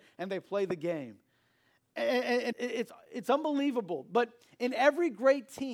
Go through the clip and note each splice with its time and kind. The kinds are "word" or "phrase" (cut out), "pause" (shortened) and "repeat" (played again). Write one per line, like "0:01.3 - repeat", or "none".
0:02.5 - word